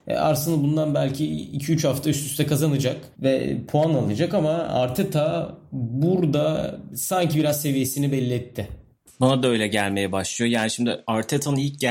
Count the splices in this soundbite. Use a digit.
1